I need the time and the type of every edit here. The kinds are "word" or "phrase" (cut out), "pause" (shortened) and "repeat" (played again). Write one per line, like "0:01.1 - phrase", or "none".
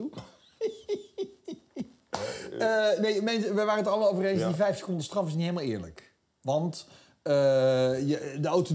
none